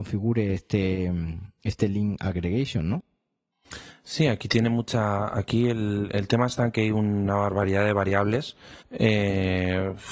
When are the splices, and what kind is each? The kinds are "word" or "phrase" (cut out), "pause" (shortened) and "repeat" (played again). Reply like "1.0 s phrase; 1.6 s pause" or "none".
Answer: 8.8 s pause